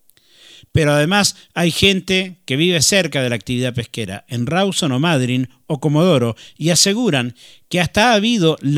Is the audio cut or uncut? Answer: uncut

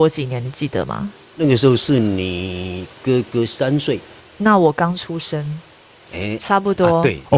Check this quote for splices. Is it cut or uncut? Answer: uncut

